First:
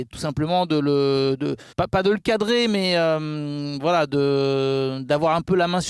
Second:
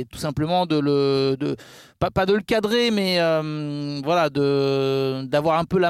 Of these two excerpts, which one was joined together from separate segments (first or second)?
first